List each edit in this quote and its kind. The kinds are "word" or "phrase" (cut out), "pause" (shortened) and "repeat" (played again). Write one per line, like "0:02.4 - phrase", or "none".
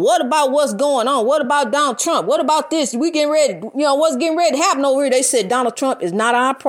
none